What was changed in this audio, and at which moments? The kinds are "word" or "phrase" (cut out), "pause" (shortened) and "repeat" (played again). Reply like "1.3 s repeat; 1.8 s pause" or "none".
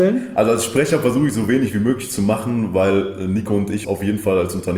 3.8 s word